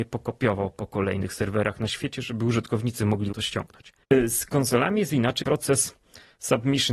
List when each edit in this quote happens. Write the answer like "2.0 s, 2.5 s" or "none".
3.3 s, 5.4 s